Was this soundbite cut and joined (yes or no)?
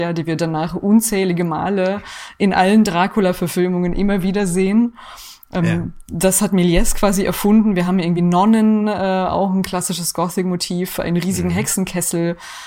no